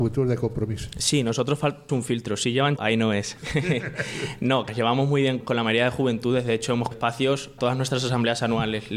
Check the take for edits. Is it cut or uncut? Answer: cut